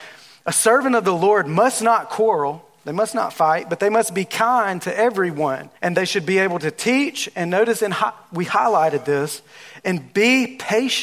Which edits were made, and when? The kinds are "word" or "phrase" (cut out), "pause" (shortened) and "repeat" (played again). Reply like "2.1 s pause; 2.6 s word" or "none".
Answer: 5.8 s pause